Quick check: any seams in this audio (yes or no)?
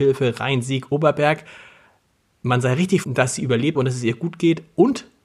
yes